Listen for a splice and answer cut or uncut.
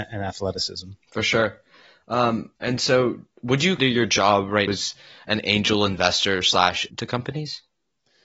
cut